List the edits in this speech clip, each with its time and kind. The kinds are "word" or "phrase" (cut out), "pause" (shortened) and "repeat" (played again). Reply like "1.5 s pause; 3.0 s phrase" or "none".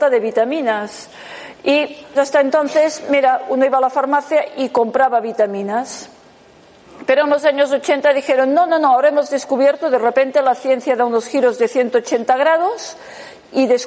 2.1 s word

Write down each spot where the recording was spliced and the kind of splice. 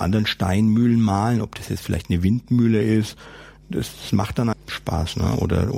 4.5 s word

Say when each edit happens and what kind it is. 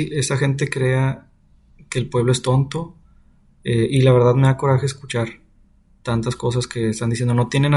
none

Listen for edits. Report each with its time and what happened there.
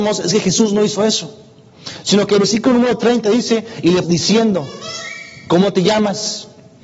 4.0 s phrase

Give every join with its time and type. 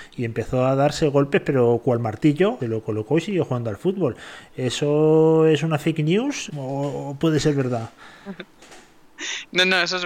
2.6 s phrase; 6.5 s word

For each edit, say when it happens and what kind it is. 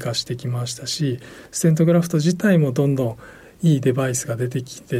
none

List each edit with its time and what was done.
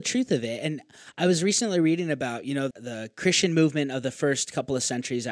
2.7 s word

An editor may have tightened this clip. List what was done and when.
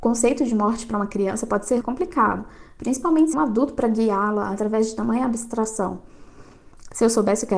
1.8 s word; 3.3 s phrase

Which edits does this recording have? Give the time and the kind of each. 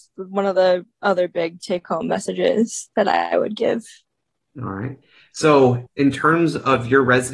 1.6 s word; 5.9 s word

